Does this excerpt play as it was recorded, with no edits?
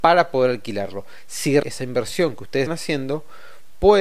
no; 2 cuts; at 1.6 s, 2.7 s

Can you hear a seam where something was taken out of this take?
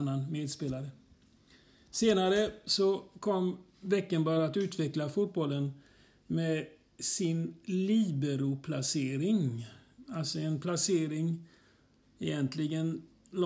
no; 0 cuts

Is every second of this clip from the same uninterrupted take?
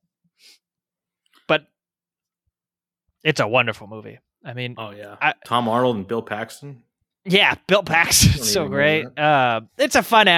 yes; 0 cuts

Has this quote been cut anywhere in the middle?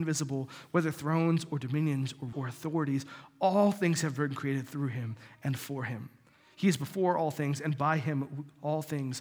yes; 1 cut; at 2.3 s

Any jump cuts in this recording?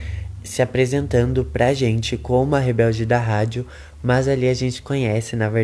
no; 0 cuts

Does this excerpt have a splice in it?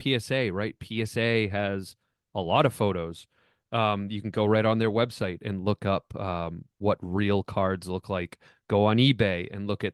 no; 0 cuts

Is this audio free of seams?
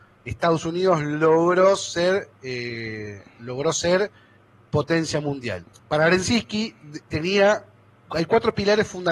no; 2 cuts; at 5.7 s, 7.0 s

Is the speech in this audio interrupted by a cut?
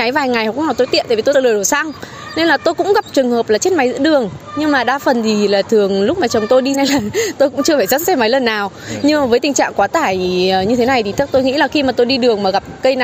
yes; 2 cuts; at 1.3 s, 6.7 s

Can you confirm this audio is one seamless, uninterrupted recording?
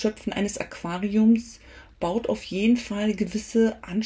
yes; 0 cuts

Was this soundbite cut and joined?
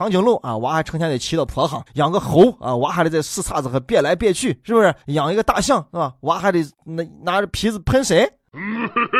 yes; 3 cuts; at 1.9 s, 5.0 s, 6.7 s

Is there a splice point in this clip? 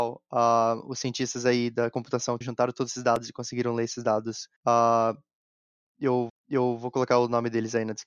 yes; 3 cuts; at 2.4 s, 4.6 s, 6.3 s

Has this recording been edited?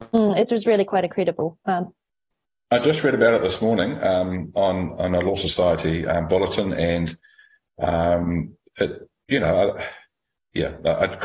no; 0 cuts

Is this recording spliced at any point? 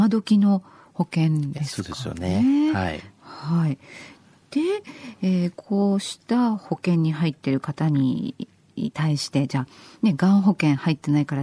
yes; 1 cut; at 1.5 s

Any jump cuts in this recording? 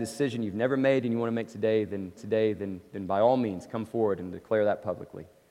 yes; 1 cut; at 2.2 s

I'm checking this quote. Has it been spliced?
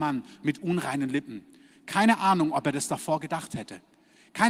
no; 0 cuts

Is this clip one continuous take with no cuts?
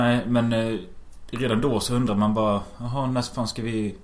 yes; 0 cuts

